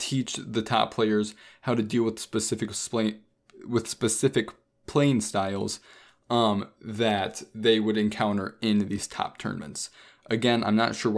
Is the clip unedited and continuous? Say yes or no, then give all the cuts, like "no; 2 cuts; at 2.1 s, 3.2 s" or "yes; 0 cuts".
yes; 0 cuts